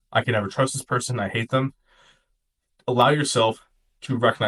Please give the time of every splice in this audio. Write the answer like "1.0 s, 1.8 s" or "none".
none